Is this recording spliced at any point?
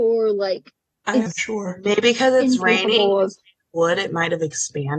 yes; 1 cut; at 1.3 s

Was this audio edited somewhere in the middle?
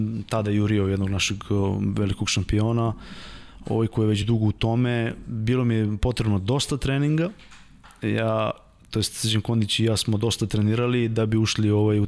no; 0 cuts

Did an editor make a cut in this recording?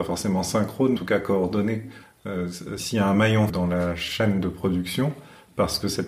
yes; 3 cuts; at 1.0 s, 2.8 s, 3.5 s

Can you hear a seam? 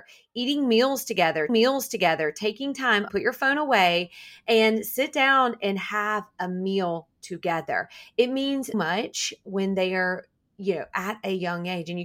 yes; 3 cuts; at 1.5 s, 3.1 s, 8.7 s

